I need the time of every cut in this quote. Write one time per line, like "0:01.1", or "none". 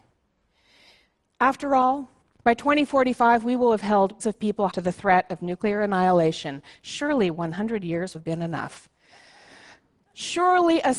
0:02.2
0:04.2
0:04.7
0:08.1